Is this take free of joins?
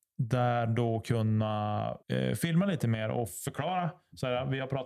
no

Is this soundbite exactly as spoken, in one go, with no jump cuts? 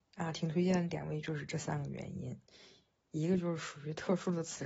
yes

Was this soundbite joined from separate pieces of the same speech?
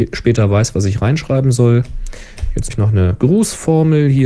yes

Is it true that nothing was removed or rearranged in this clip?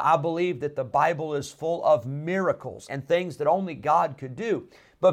no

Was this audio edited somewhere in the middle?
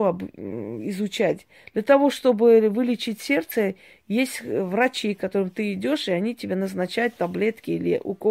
no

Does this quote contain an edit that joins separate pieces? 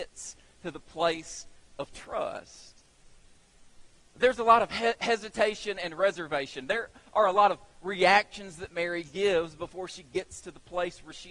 no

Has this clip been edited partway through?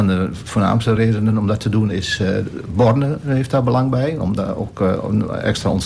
no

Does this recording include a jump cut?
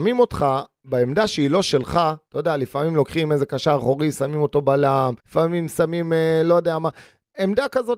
yes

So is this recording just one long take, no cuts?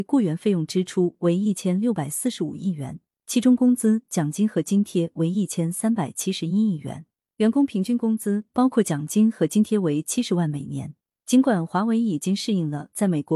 yes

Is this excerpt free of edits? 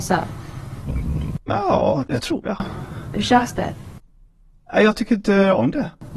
no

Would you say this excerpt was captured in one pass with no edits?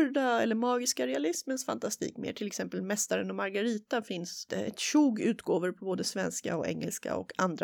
yes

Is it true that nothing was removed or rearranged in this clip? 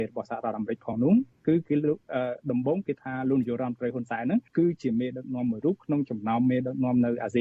no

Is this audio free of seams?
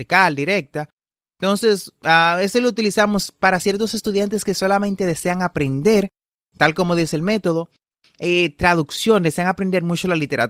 yes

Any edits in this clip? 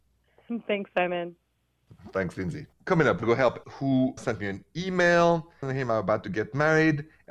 yes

